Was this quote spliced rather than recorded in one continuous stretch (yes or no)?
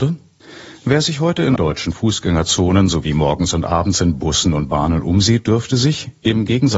yes